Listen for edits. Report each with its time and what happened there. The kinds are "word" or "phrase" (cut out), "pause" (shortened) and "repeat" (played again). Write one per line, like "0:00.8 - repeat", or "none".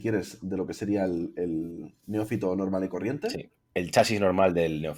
none